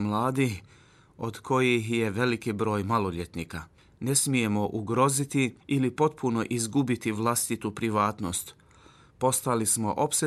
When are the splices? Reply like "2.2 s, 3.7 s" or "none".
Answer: 5.6 s